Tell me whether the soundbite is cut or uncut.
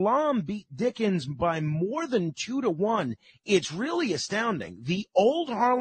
uncut